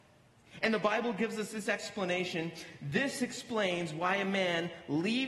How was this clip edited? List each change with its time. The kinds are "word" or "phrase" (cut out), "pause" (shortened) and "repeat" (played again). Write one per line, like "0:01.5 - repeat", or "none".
none